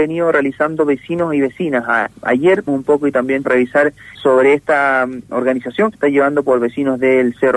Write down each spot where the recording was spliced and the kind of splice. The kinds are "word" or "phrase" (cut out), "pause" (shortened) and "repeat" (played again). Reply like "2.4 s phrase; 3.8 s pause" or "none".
2.7 s word; 3.4 s word; 4.1 s word; 5.3 s word; 5.9 s word